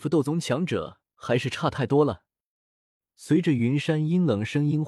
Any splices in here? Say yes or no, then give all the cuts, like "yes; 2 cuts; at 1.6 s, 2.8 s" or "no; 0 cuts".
no; 0 cuts